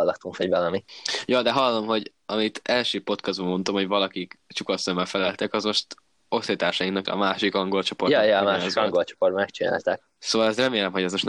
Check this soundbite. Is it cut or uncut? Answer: cut